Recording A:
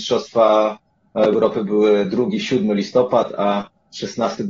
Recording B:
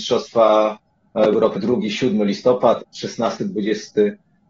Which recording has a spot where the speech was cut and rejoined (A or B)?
B